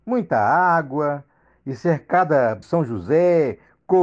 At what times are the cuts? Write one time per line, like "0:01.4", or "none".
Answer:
0:02.6

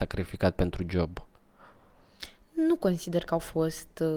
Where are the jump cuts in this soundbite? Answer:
none

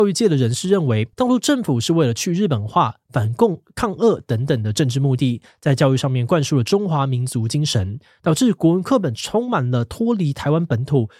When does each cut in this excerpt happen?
0:01.1

